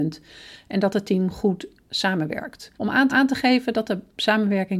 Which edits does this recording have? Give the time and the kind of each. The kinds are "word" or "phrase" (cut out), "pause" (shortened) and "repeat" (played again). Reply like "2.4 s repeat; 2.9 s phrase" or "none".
2.7 s pause; 3.1 s repeat